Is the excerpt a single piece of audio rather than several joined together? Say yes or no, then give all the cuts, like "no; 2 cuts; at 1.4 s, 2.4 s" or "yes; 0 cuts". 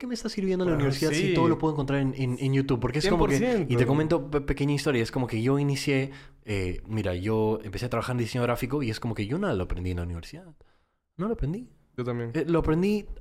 yes; 0 cuts